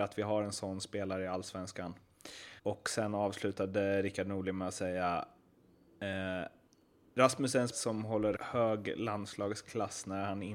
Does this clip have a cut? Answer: yes; 3 cuts; at 2.6 s, 7.7 s, 8.4 s

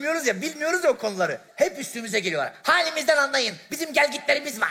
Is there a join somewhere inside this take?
yes; 1 cut; at 1.5 s

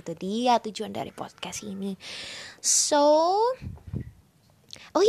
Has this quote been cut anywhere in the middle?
no; 0 cuts

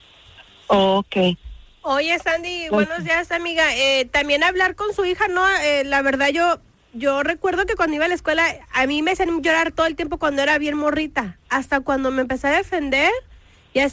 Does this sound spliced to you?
no; 0 cuts

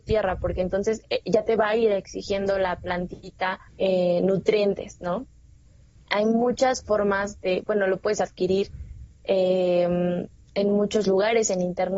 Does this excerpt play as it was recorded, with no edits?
no; 1 cut; at 3.7 s

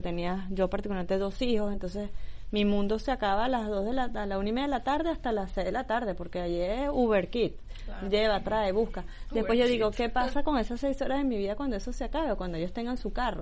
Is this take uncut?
yes; 0 cuts

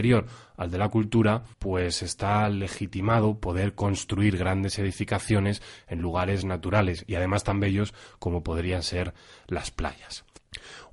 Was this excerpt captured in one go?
no; 1 cut; at 1.5 s

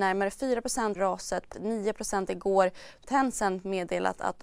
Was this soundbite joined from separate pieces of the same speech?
yes; 3 cuts; at 1.0 s, 1.5 s, 3.0 s

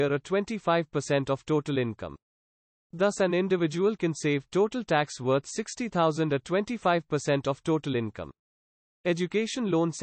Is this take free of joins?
yes; 0 cuts

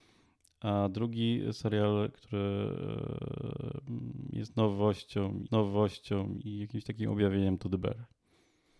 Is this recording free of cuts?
no; 1 cut; at 5.5 s

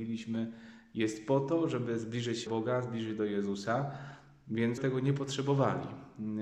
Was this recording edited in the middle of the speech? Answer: yes; 2 cuts; at 2.5 s, 4.8 s

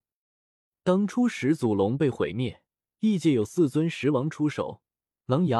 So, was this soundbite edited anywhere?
yes; 1 cut; at 2.7 s

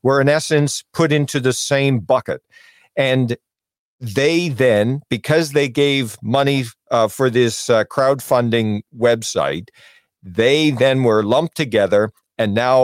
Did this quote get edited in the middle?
no; 0 cuts

